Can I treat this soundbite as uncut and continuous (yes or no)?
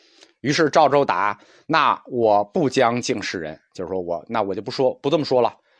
yes